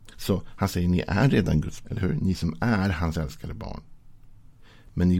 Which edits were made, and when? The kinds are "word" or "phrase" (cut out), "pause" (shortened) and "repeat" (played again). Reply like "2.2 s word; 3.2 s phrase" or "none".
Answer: 1.8 s word